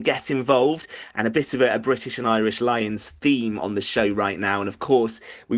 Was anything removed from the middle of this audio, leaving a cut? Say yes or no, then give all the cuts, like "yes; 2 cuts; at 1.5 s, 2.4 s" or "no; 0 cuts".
no; 0 cuts